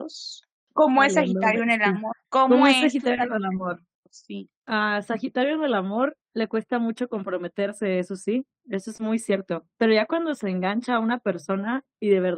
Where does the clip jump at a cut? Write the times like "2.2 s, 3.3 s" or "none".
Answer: 2.2 s, 3.9 s, 6.2 s